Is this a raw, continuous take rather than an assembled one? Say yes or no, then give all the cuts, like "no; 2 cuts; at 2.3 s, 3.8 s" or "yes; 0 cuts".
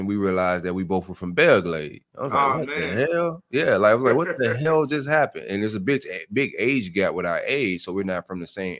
no; 1 cut; at 2.1 s